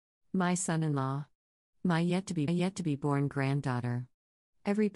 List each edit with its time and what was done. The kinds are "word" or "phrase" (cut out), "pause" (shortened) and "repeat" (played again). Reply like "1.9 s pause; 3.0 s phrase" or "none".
2.5 s repeat